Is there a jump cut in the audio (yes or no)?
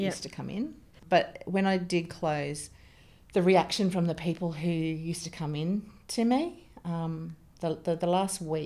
no